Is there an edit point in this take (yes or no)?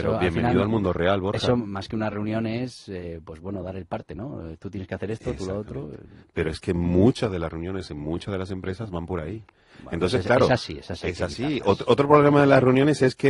no